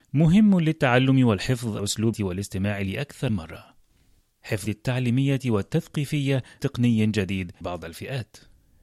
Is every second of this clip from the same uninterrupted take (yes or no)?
no